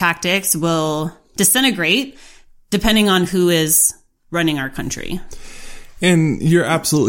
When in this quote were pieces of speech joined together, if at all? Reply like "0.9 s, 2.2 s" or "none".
none